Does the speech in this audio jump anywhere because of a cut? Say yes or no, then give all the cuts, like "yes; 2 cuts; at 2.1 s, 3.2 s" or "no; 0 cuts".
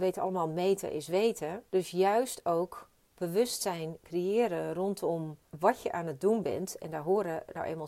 yes; 2 cuts; at 1.7 s, 5.5 s